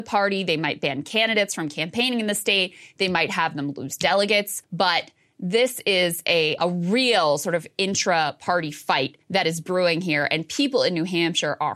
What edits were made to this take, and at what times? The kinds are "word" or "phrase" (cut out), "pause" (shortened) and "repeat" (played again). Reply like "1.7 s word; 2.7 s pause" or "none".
4.6 s pause; 6.6 s word; 9.2 s pause